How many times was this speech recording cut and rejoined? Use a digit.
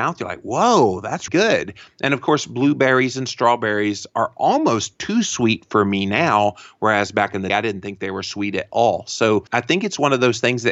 3